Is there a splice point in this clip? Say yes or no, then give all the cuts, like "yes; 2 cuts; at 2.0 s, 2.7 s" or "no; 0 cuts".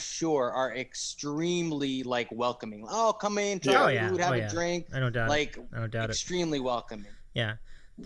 no; 0 cuts